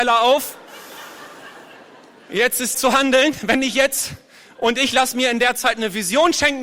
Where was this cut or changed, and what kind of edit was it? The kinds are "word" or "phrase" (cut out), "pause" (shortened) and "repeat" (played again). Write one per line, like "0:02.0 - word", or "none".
0:02.7 - word
0:04.5 - word